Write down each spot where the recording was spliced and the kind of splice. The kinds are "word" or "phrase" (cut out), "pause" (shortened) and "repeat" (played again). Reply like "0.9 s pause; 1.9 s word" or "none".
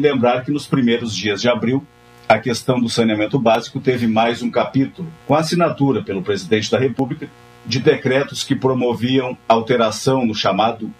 5.2 s pause